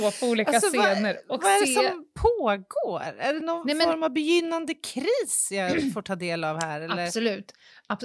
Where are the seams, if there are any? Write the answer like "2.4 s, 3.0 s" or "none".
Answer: none

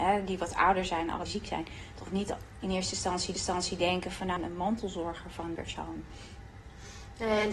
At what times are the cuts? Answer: 1.3 s, 3.3 s, 4.4 s, 5.6 s

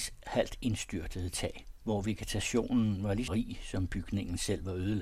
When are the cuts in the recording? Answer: 3.3 s

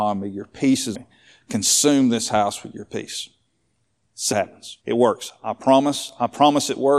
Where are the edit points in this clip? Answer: 0.9 s, 4.3 s, 4.8 s

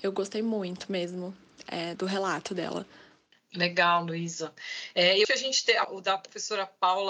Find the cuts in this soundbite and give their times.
2.0 s, 5.2 s, 5.8 s

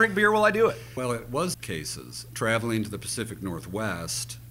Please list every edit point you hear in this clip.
1.5 s

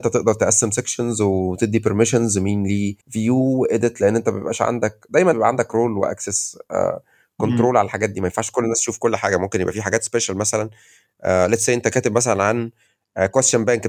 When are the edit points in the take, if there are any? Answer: 3.0 s, 5.3 s

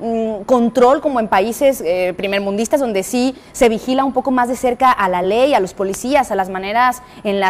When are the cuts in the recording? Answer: none

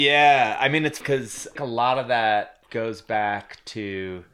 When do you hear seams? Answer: 1.0 s, 1.6 s, 2.6 s

